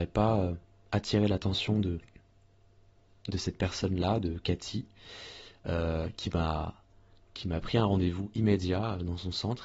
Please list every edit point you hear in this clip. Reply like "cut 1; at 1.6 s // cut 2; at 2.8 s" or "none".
none